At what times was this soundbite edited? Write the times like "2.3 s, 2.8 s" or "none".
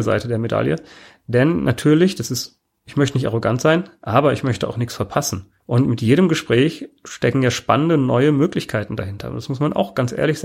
5.6 s